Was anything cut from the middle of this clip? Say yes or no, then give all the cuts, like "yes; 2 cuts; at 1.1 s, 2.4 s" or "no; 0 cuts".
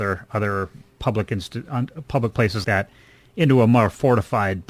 yes; 1 cut; at 2.6 s